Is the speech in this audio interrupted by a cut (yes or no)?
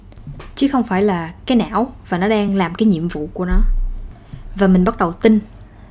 no